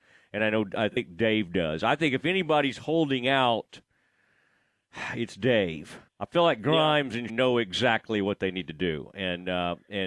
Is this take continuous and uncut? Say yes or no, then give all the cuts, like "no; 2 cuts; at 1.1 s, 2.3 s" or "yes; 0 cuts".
no; 2 cuts; at 6.1 s, 7.3 s